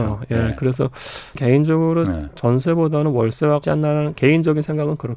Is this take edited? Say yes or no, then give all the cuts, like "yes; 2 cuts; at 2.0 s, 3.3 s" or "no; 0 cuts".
yes; 3 cuts; at 1.4 s, 3.6 s, 4.2 s